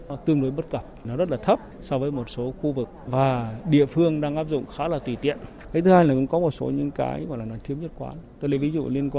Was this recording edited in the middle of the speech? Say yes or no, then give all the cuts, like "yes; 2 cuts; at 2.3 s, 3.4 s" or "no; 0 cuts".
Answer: no; 0 cuts